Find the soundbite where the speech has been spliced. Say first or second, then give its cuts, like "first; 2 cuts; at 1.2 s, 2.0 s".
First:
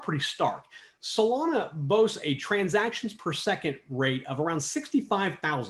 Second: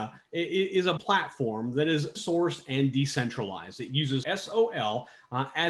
second; 3 cuts; at 1.0 s, 2.1 s, 4.2 s